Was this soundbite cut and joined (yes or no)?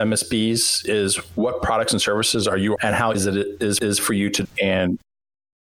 yes